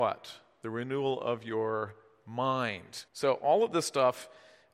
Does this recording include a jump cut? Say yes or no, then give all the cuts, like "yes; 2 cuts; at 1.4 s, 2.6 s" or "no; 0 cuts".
yes; 1 cut; at 3.1 s